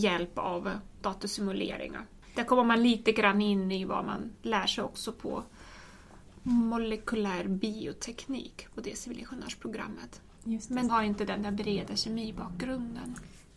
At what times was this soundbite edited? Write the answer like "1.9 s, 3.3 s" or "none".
0.9 s, 4.4 s, 10.9 s